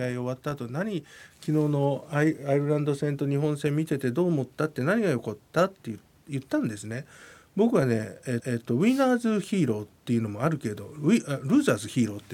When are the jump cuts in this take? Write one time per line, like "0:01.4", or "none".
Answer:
0:08.4
0:10.0